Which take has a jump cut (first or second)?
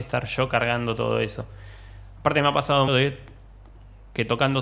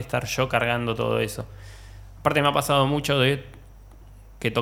first